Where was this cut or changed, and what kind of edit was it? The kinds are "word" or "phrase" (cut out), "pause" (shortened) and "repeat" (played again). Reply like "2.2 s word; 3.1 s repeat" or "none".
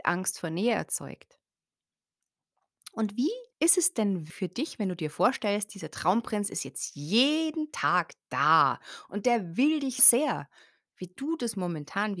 3.5 s pause; 4.3 s word; 10.0 s word